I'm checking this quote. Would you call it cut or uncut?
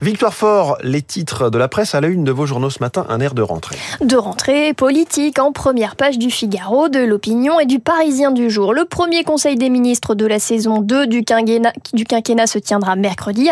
uncut